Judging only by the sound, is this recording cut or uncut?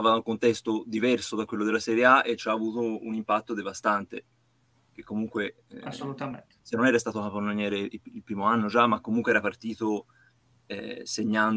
uncut